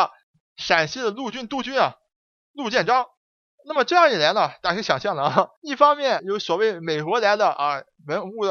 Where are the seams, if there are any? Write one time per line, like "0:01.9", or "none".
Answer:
0:05.6
0:06.2